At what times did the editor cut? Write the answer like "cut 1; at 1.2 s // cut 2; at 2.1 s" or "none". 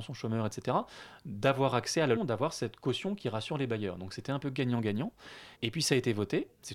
cut 1; at 2.2 s // cut 2; at 5.5 s